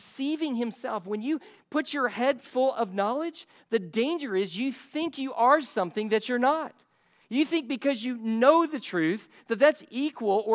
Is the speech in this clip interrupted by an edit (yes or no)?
no